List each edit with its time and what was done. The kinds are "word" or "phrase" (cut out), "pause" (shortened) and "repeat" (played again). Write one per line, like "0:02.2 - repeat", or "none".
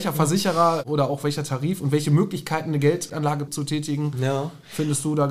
0:03.5 - word